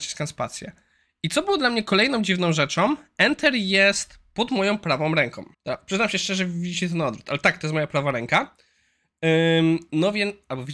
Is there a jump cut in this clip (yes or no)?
yes